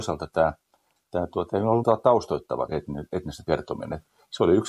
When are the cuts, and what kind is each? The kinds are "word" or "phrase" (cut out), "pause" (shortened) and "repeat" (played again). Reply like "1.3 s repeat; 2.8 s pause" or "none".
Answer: 1.8 s word; 2.7 s word; 3.4 s word

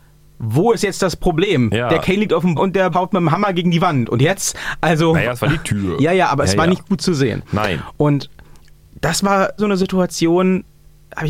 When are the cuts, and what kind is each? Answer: 2.6 s word; 2.9 s word; 9.6 s word

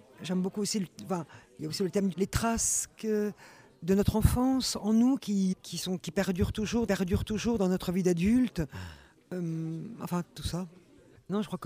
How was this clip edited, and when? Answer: 2.1 s word; 5.5 s word; 6.9 s repeat

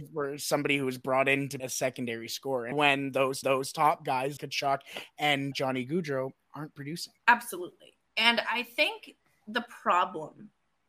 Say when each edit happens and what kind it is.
1.6 s word; 2.7 s word; 3.4 s repeat; 4.4 s word; 5.5 s word; 7.2 s pause

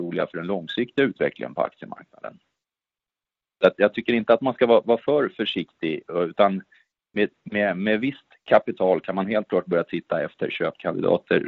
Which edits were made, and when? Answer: none

